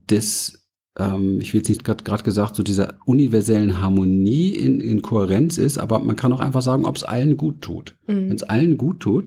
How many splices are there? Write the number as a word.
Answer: two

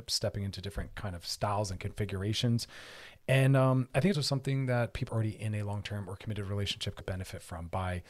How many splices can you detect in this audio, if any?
three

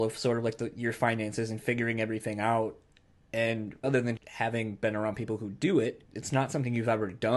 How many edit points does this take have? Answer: three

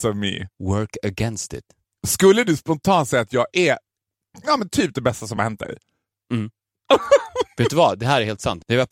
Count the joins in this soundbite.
zero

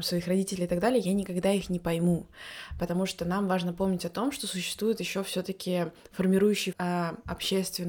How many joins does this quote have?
one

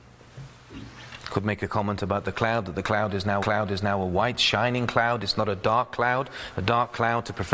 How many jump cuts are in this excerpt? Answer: one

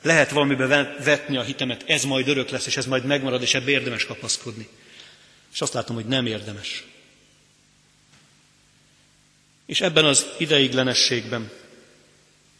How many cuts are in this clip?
zero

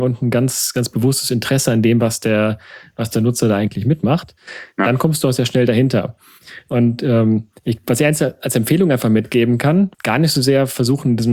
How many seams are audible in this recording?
one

